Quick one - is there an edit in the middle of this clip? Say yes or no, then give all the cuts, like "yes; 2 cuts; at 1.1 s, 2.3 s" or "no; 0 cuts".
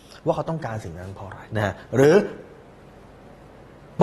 yes; 1 cut; at 1.5 s